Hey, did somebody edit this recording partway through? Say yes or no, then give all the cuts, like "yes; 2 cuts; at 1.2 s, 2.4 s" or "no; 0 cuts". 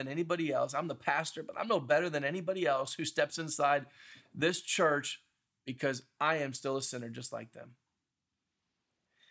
no; 0 cuts